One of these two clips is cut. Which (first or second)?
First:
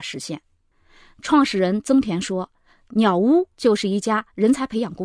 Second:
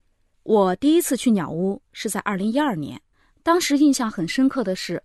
second